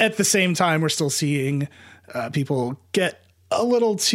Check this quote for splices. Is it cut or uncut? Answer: uncut